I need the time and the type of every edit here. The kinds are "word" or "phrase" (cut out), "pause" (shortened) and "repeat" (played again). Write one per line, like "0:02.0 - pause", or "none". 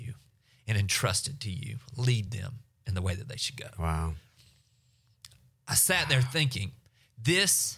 none